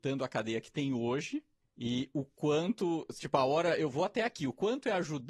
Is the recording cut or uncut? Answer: cut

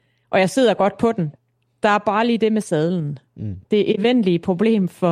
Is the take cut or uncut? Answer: cut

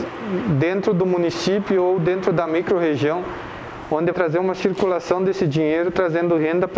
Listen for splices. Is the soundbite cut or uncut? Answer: cut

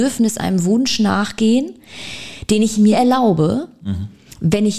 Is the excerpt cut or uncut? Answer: cut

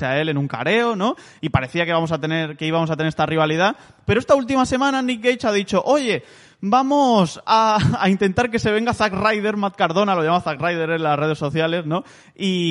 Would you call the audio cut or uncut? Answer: uncut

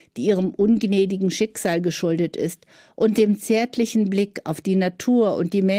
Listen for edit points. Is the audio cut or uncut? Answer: uncut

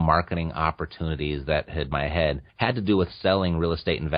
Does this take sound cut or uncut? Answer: cut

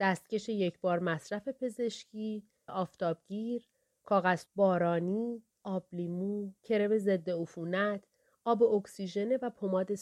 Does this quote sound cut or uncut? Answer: cut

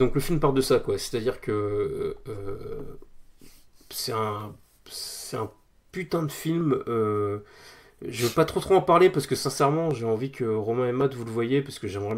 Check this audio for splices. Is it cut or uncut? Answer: uncut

